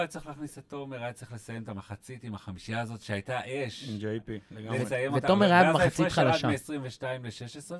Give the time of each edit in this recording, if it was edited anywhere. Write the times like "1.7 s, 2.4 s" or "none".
none

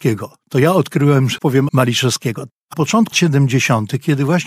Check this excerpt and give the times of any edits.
1.4 s, 1.7 s, 2.7 s, 3.1 s

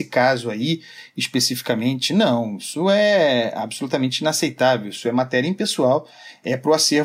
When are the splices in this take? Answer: none

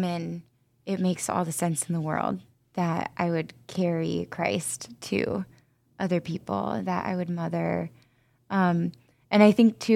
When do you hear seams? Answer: none

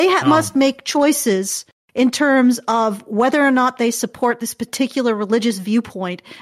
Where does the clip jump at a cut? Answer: none

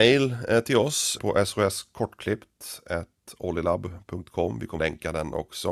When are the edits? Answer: 1.2 s, 4.8 s

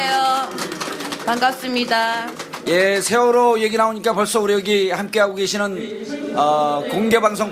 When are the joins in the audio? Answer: none

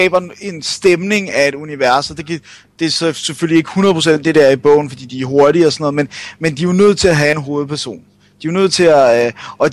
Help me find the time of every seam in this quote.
none

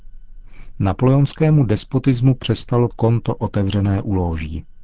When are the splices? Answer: 2.9 s

